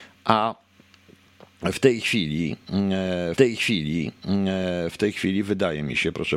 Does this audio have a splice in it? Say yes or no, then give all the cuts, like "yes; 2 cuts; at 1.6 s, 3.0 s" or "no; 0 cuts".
yes; 1 cut; at 3.4 s